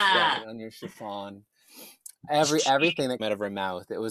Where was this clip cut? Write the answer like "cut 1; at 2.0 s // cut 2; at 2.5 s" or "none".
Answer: cut 1; at 2.2 s // cut 2; at 3.2 s